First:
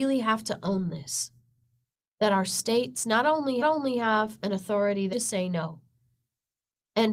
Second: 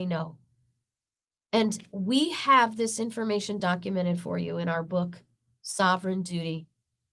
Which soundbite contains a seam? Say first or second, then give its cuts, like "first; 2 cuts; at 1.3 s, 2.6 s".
first; 2 cuts; at 3.6 s, 5.1 s